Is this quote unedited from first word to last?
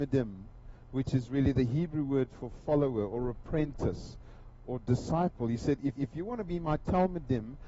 no; 1 cut; at 6.0 s

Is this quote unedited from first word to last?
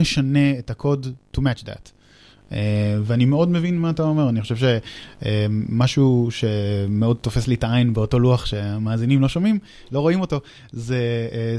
yes; 0 cuts

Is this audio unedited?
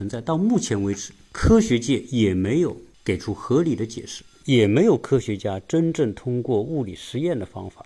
yes; 0 cuts

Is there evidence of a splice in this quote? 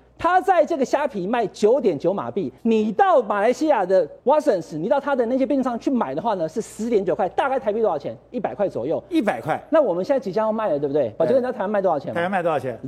yes; 2 cuts; at 2.6 s, 4.2 s

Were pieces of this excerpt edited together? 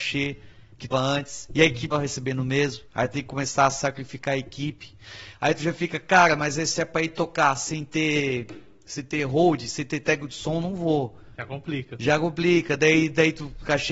yes; 4 cuts; at 0.9 s, 1.9 s, 2.9 s, 11.3 s

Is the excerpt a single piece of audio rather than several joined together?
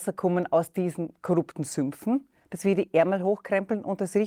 yes; 0 cuts

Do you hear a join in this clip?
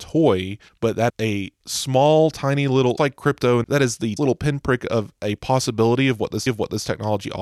yes; 6 cuts; at 1.1 s, 1.6 s, 3.0 s, 3.6 s, 4.2 s, 6.5 s

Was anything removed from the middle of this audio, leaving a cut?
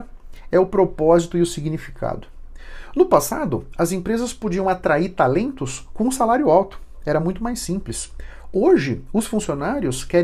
no; 0 cuts

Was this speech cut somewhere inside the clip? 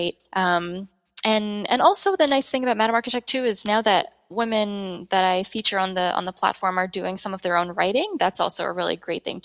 no; 0 cuts

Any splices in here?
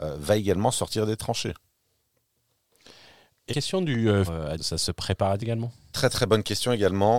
yes; 5 cuts; at 3.5 s, 4.3 s, 4.6 s, 5.4 s, 5.9 s

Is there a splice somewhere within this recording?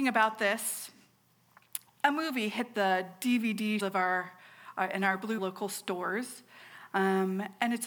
yes; 4 cuts; at 1.9 s, 2.7 s, 3.8 s, 5.4 s

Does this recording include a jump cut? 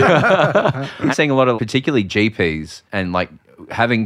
yes; 3 cuts; at 1.1 s, 1.6 s, 2.9 s

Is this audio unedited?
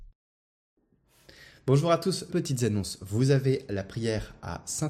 no; 1 cut; at 2.3 s

